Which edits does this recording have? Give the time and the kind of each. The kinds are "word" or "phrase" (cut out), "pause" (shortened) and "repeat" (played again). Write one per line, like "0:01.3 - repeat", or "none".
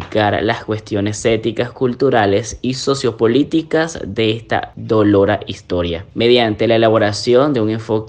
none